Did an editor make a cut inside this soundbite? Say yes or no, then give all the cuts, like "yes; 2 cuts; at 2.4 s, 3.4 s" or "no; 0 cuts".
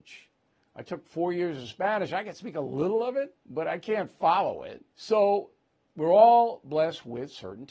yes; 2 cuts; at 3.4 s, 4.9 s